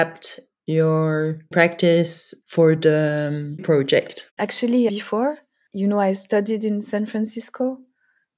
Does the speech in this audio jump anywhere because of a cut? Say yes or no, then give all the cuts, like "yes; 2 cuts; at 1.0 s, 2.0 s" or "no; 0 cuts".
yes; 3 cuts; at 1.5 s, 3.6 s, 4.9 s